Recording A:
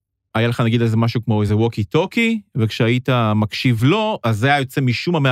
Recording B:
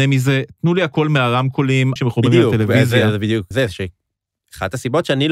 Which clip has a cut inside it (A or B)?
B